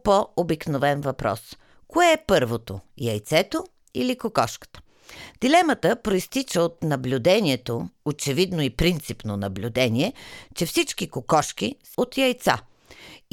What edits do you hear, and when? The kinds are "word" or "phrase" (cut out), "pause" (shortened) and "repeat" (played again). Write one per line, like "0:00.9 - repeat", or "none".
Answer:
0:11.9 - word